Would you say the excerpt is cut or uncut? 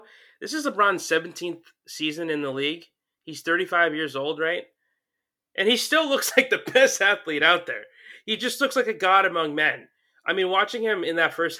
uncut